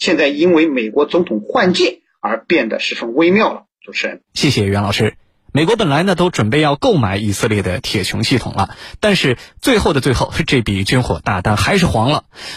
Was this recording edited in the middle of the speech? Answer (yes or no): yes